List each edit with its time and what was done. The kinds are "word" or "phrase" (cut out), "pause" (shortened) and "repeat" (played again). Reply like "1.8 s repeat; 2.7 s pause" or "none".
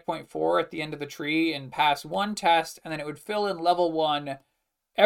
none